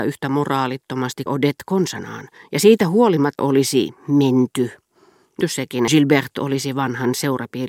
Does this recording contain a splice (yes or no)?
yes